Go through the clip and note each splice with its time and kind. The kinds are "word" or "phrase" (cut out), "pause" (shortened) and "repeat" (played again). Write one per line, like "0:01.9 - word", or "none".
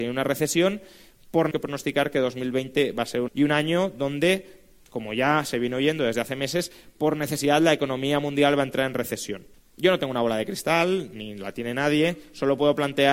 0:01.5 - phrase
0:03.3 - phrase
0:09.5 - pause

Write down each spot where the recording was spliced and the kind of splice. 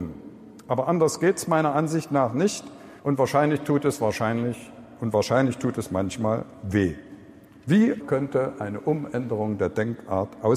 0:03.0 - pause
0:08.0 - word

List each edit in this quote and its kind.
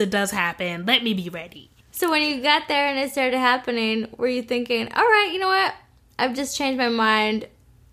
none

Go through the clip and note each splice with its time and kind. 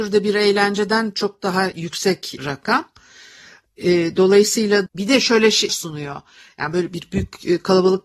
0:02.4 - word
0:04.9 - word
0:05.7 - word

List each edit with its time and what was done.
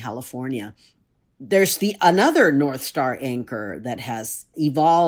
none

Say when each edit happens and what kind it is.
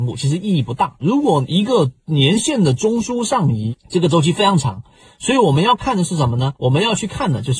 0:06.6 - pause

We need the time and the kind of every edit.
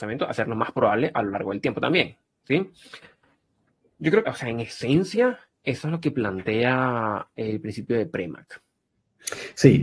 0:02.3 - pause
0:04.2 - phrase

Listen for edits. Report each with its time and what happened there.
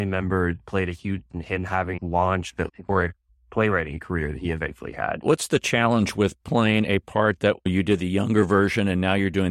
0:01.3 - word
0:02.0 - word
0:02.7 - word

